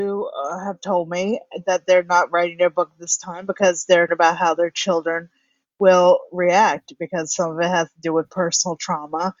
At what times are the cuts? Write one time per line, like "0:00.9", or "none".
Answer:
0:04.1